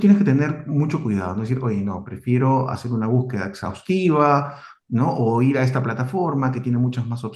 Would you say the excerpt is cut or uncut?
uncut